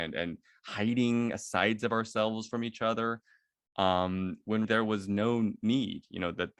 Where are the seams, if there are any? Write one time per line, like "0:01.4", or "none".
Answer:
0:04.6